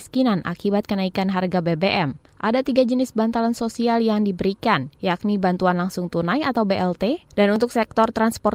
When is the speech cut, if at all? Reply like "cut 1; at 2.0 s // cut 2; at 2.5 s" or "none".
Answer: cut 1; at 2.3 s // cut 2; at 5.0 s